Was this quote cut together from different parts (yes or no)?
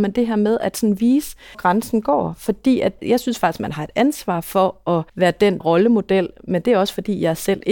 yes